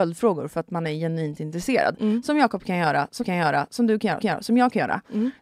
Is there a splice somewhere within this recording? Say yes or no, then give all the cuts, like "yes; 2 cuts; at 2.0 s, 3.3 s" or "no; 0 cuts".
yes; 2 cuts; at 3.2 s, 4.2 s